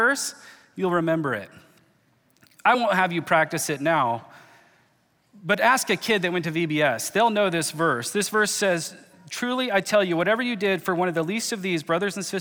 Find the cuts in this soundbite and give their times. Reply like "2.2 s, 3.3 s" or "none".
none